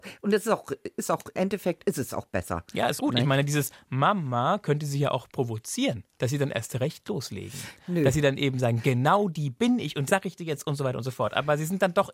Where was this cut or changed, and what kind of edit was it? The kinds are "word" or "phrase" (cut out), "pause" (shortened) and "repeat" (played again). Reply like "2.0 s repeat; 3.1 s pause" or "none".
1.3 s word; 3.0 s word; 6.1 s pause; 10.1 s word